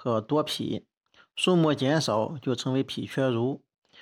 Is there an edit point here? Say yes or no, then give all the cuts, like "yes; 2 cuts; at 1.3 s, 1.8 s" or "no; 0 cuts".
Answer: no; 0 cuts